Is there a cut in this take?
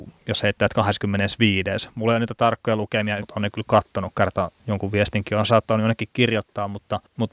yes; 4 cuts; at 3.2 s, 4.6 s, 5.5 s, 6.1 s

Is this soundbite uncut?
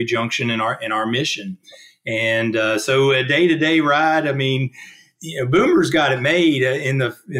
yes; 0 cuts

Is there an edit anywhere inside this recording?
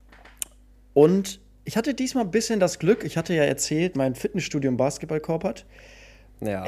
yes; 1 cut; at 3.9 s

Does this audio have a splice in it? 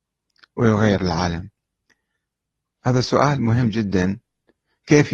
yes; 1 cut; at 1.9 s

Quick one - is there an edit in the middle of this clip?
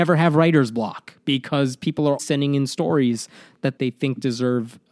yes; 2 cuts; at 2.2 s, 3.8 s

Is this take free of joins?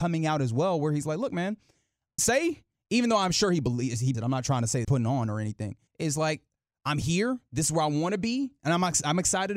no; 4 cuts; at 2.2 s, 4.1 s, 4.8 s, 5.9 s

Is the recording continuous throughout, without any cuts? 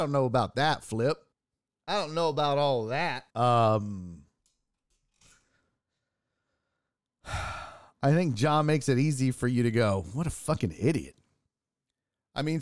no; 2 cuts; at 1.3 s, 3.3 s

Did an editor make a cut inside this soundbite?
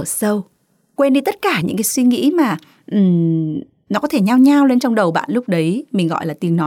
no; 0 cuts

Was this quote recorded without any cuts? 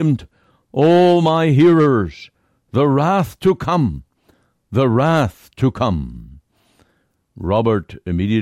yes; 0 cuts

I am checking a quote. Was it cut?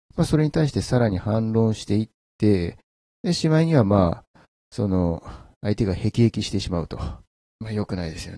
no; 0 cuts

